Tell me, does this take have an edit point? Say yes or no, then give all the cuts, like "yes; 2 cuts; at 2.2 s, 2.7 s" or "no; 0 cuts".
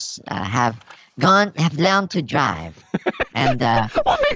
no; 0 cuts